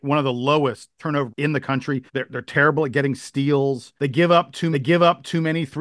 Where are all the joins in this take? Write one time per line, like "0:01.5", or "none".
0:01.3
0:02.1
0:04.0
0:04.7